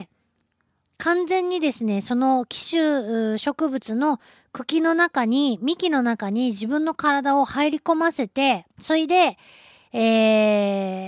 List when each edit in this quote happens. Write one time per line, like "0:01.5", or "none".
0:08.7